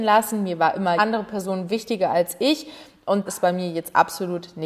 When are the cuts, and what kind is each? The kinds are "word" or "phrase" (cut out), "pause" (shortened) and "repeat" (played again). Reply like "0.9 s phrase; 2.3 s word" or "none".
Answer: 1.0 s word; 3.3 s word